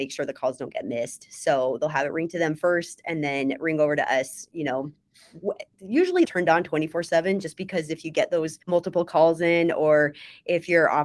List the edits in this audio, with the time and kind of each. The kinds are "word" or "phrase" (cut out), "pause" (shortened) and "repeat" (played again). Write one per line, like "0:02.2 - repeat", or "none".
0:06.2 - phrase
0:08.6 - pause

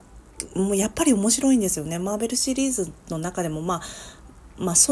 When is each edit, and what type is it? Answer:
none

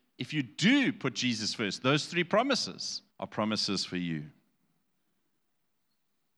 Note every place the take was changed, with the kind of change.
0:03.1 - pause

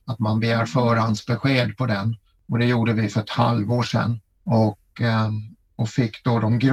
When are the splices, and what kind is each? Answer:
none

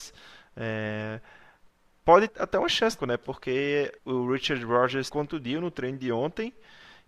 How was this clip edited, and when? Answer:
0:02.3 - word
0:03.0 - phrase
0:04.0 - pause
0:05.1 - word

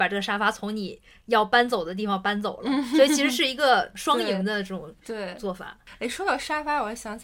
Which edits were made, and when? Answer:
none

